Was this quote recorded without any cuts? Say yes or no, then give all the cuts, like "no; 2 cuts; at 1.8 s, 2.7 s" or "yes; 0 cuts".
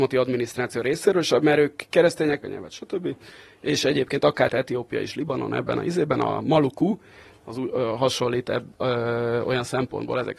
no; 2 cuts; at 2.4 s, 4.5 s